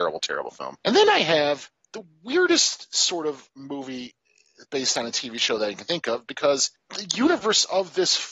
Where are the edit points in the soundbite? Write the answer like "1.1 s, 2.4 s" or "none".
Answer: none